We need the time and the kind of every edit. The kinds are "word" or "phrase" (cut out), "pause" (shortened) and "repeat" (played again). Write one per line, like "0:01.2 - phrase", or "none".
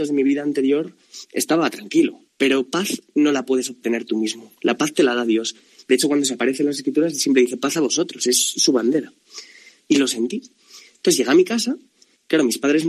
none